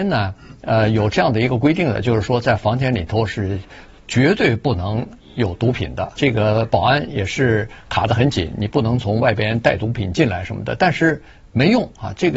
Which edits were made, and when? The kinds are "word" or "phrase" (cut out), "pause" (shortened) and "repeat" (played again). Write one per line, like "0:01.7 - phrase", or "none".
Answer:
0:06.2 - word